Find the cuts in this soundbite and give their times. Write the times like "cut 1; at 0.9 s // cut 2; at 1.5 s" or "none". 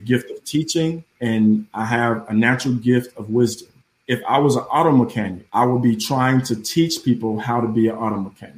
cut 1; at 1.1 s // cut 2; at 3.8 s // cut 3; at 5.5 s